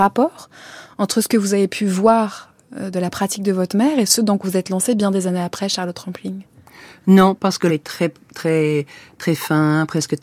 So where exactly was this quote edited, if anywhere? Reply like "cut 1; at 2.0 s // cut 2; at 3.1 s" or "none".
cut 1; at 4.4 s // cut 2; at 7.7 s

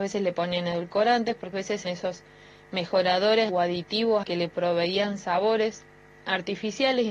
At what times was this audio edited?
cut 1; at 1.5 s // cut 2; at 1.8 s // cut 3; at 3.5 s // cut 4; at 4.2 s

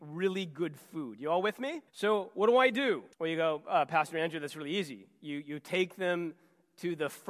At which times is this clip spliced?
cut 1; at 1.9 s // cut 2; at 3.1 s

